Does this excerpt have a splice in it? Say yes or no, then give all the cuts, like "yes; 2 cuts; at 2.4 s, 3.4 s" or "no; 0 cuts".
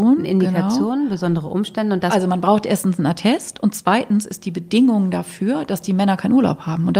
no; 0 cuts